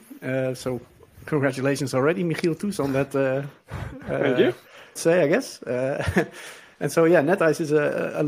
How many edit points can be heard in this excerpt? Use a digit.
1